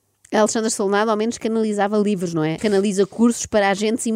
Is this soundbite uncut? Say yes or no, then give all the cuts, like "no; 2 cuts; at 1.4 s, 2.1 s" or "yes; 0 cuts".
no; 1 cut; at 2.6 s